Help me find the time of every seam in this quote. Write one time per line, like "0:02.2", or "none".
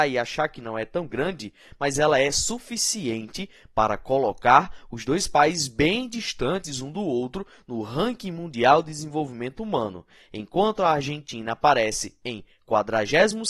none